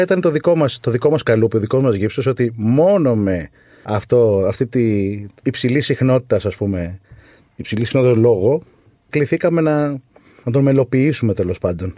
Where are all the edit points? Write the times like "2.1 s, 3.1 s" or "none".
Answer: none